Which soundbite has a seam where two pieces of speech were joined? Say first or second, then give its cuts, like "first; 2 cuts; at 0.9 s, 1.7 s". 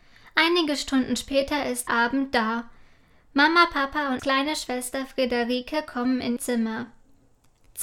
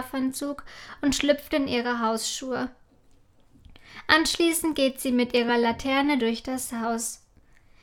first; 3 cuts; at 1.9 s, 4.2 s, 6.4 s